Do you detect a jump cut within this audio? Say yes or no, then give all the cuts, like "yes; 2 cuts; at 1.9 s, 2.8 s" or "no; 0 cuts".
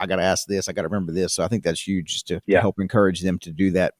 no; 0 cuts